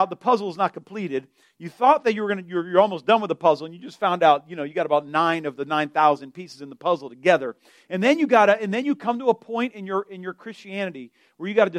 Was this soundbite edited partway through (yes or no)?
no